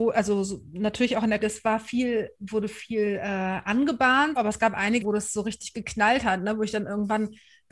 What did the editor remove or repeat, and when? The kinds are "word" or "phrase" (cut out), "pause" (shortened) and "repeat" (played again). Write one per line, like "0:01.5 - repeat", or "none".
0:01.4 - word
0:04.4 - word
0:05.0 - word